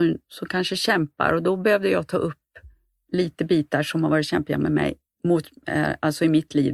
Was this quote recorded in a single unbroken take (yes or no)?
yes